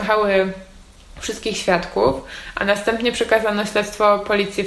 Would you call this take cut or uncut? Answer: uncut